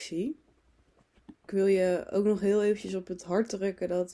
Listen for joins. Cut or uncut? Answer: cut